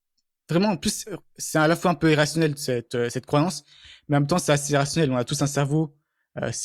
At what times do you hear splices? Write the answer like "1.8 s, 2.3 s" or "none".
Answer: none